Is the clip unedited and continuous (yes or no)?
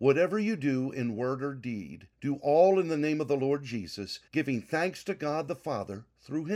no